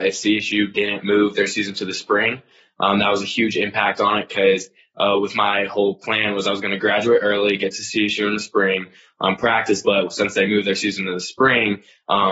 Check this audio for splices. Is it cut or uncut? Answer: uncut